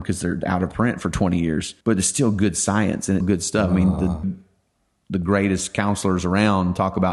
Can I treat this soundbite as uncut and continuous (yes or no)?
no